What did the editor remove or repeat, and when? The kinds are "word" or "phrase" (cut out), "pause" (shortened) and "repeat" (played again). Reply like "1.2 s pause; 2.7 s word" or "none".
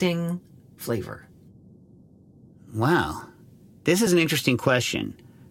none